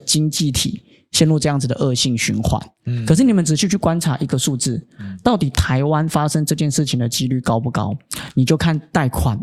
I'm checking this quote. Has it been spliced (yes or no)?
no